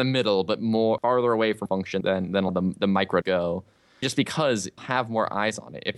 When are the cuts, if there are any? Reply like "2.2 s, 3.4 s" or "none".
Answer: 1.0 s, 1.7 s, 2.0 s, 2.5 s, 3.2 s, 4.0 s, 4.8 s

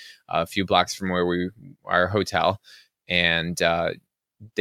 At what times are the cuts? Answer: none

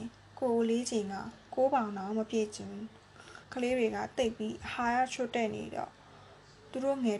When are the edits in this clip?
3.4 s

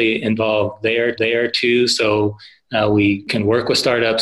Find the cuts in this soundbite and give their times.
1.1 s

